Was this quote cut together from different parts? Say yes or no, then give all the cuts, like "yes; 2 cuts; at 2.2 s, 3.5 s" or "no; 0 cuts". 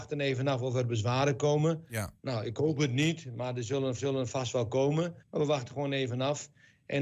yes; 2 cuts; at 4.0 s, 5.2 s